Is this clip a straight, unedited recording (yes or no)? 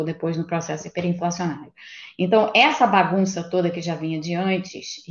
yes